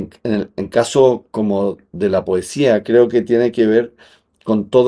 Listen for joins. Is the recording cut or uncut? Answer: cut